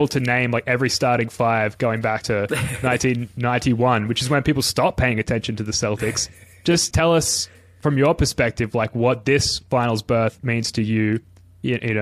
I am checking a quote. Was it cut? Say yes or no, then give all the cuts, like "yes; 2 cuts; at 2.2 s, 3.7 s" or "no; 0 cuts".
yes; 1 cut; at 6.9 s